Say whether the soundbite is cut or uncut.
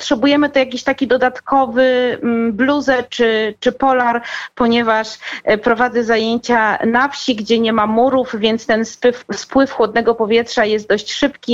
uncut